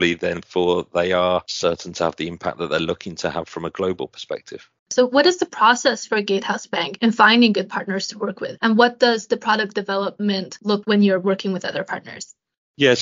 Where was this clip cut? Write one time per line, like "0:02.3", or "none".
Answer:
0:04.8
0:10.8